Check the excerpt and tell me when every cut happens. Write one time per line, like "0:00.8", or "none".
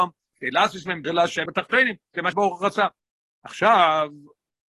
0:01.0
0:01.5
0:02.3
0:03.0